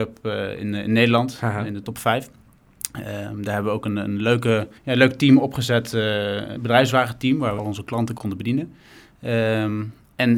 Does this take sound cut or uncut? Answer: cut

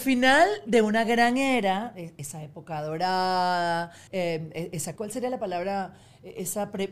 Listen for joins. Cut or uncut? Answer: cut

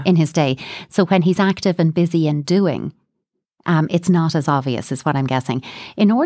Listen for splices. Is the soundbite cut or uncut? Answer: uncut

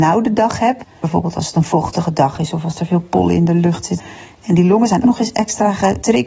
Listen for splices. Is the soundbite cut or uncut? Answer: cut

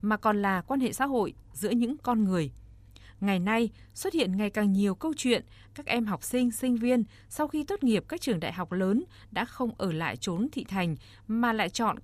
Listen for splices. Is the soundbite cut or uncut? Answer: uncut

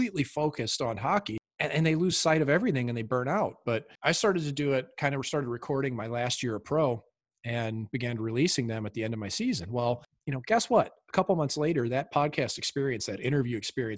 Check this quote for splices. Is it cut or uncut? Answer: uncut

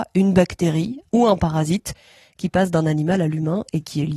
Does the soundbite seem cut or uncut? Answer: cut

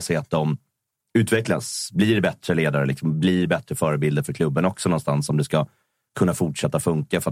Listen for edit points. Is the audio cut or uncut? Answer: uncut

